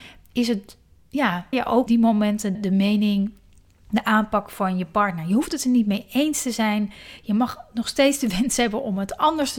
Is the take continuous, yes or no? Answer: no